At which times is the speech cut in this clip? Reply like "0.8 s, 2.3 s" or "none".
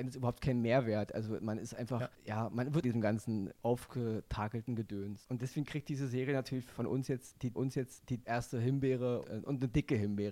2.8 s, 7.5 s, 9.2 s